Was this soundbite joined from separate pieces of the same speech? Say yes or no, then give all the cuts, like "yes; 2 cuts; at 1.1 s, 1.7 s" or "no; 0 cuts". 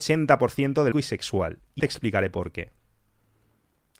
yes; 2 cuts; at 0.9 s, 1.8 s